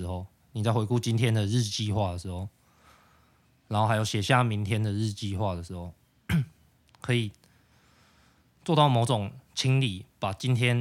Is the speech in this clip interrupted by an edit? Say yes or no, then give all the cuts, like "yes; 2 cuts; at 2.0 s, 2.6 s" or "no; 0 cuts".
no; 0 cuts